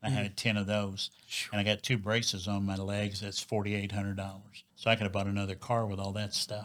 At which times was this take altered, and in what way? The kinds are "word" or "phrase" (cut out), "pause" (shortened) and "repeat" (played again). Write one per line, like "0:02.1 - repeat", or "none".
0:04.7 - pause